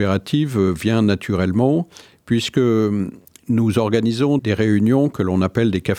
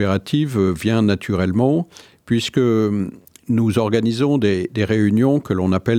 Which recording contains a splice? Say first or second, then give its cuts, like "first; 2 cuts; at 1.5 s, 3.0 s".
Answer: first; 1 cut; at 4.4 s